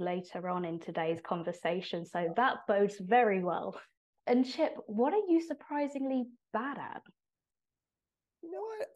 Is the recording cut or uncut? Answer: uncut